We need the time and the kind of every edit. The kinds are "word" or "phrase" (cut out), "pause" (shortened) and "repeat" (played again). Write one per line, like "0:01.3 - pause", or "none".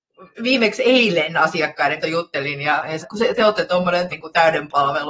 0:02.0 - word
0:03.0 - word
0:04.1 - word